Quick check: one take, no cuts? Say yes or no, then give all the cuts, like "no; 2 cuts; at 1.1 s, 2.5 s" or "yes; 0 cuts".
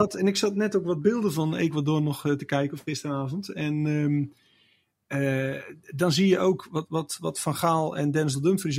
yes; 0 cuts